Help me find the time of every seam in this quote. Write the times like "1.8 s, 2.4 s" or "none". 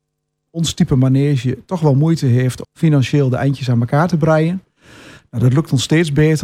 2.6 s